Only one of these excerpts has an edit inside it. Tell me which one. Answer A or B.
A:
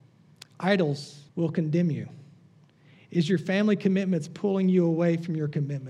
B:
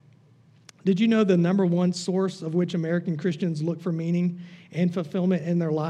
A